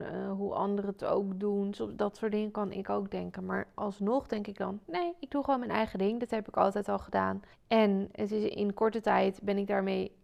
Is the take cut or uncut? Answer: cut